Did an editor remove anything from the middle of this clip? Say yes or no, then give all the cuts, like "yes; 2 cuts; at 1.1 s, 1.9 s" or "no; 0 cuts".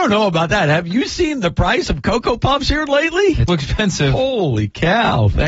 yes; 1 cut; at 3.5 s